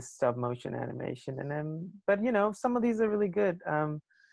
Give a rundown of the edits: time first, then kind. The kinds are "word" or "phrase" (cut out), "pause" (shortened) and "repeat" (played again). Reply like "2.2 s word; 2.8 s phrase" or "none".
none